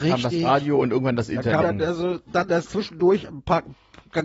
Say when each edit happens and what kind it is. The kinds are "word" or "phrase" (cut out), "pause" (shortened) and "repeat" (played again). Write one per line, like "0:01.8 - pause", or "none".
0:01.6 - phrase
0:02.7 - word